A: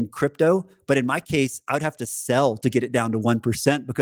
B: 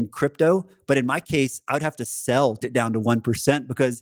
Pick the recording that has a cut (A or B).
B